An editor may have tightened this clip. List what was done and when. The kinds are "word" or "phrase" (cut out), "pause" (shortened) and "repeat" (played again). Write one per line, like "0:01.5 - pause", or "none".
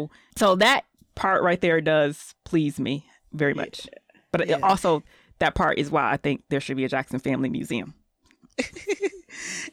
none